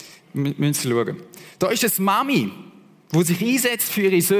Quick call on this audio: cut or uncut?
uncut